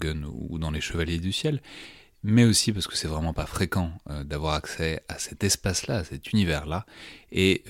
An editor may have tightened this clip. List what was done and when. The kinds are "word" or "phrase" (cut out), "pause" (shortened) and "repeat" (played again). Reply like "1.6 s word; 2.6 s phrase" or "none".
none

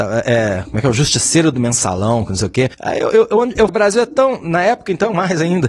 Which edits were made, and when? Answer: 2.7 s pause; 3.7 s phrase

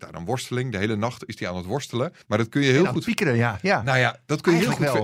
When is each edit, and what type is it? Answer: 2.2 s pause

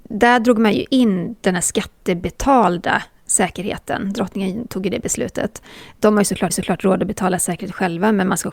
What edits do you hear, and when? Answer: 6.5 s repeat

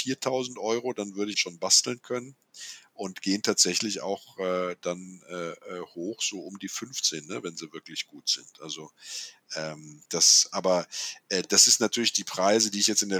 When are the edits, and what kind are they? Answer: 1.3 s phrase; 10.0 s pause

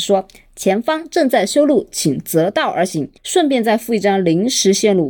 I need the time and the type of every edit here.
3.2 s pause

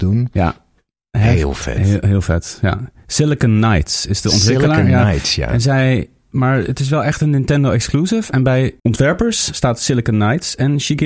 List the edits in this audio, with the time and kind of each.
8.8 s pause

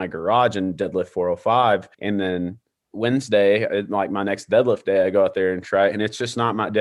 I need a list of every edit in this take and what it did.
1.9 s pause; 2.8 s pause

